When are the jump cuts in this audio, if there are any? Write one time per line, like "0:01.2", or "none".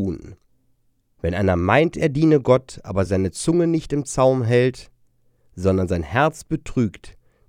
none

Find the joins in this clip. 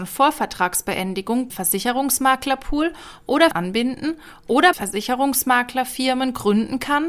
0:01.5
0:03.5
0:04.7

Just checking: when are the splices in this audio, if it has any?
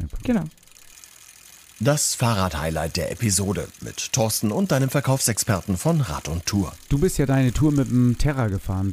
none

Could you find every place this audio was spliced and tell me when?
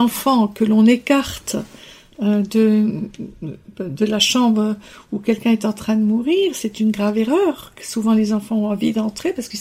none

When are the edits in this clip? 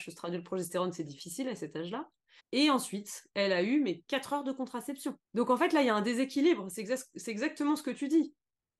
0:02.4
0:05.3

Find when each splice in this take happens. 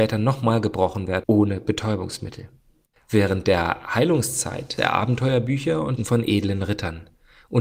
0:01.2
0:02.9
0:04.8
0:06.0

